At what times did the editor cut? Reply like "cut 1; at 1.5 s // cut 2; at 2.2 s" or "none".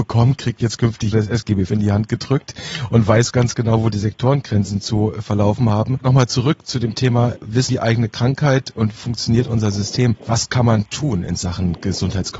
cut 1; at 1.1 s // cut 2; at 1.7 s // cut 3; at 7.7 s // cut 4; at 8.9 s